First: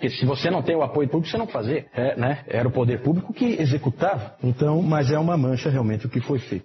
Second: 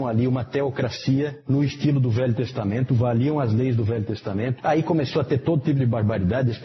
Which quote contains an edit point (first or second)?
first